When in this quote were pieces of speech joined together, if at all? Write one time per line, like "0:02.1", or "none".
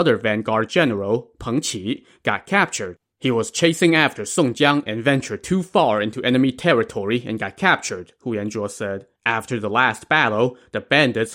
0:03.1
0:09.2